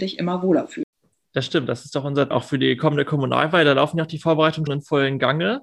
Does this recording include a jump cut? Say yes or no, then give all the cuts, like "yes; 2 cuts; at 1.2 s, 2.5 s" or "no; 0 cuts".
yes; 2 cuts; at 2.3 s, 4.7 s